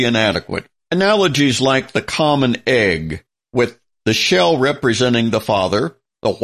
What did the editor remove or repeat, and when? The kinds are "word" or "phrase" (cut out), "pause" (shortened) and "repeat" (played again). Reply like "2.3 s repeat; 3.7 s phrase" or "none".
none